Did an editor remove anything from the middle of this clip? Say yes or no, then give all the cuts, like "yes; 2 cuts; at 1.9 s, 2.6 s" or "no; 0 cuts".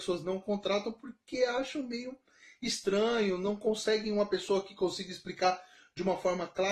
no; 0 cuts